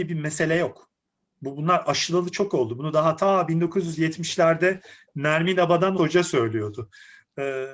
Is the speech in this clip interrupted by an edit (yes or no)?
yes